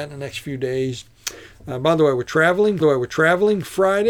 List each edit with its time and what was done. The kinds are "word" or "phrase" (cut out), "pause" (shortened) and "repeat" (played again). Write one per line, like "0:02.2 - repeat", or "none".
0:02.8 - repeat